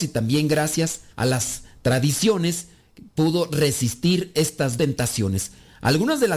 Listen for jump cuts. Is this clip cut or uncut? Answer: cut